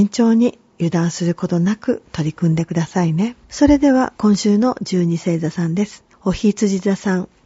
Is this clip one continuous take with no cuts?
no; 2 cuts; at 3.4 s, 6.1 s

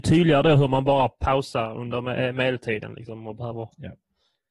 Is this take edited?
no; 0 cuts

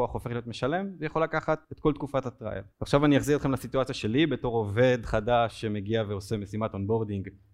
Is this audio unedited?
no; 2 cuts; at 1.6 s, 2.7 s

